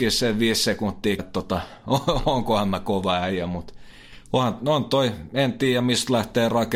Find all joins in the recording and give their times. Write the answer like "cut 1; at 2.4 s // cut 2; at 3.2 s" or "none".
cut 1; at 1.2 s